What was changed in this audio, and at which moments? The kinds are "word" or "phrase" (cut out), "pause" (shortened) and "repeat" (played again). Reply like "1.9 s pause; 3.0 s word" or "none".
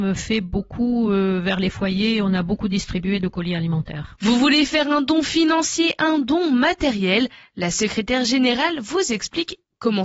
none